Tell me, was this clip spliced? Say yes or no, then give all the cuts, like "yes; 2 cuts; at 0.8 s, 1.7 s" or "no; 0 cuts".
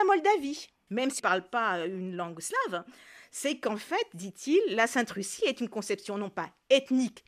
yes; 1 cut; at 1.2 s